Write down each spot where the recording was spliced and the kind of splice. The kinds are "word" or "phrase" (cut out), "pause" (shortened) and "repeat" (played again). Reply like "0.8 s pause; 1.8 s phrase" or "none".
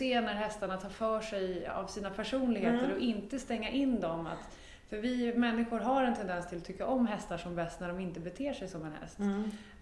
none

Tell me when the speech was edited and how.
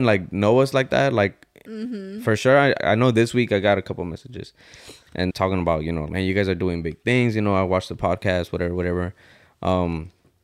2.8 s word; 5.3 s word; 6.1 s word

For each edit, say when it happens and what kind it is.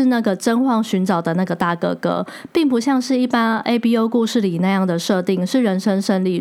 none

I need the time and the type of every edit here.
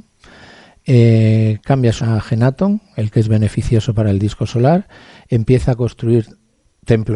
2.0 s word

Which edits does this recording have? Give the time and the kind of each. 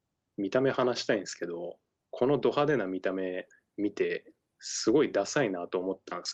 1.9 s phrase

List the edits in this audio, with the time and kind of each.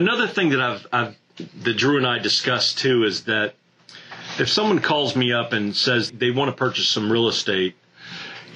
4.5 s phrase; 6.1 s word

